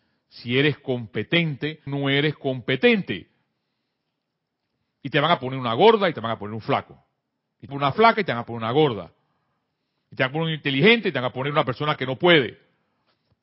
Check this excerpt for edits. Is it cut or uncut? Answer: cut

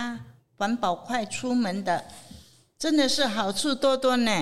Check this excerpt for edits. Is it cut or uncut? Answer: uncut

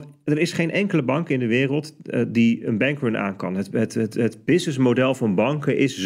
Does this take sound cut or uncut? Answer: uncut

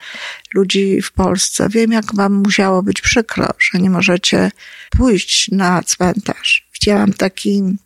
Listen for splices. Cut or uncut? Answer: cut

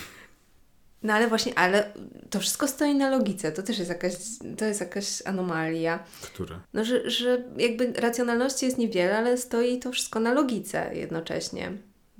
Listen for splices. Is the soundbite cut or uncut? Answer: cut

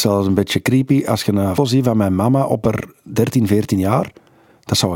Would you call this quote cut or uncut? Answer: cut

